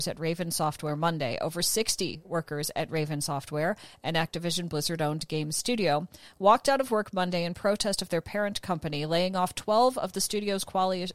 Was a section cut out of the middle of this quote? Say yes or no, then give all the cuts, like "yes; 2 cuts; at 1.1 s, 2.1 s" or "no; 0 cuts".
no; 0 cuts